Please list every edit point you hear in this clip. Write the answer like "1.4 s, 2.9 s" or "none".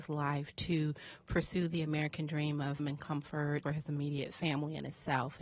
2.8 s, 3.6 s